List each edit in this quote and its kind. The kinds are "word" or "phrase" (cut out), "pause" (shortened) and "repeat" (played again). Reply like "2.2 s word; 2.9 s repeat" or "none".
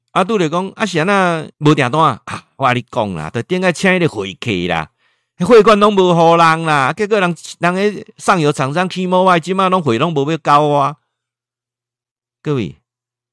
1.5 s pause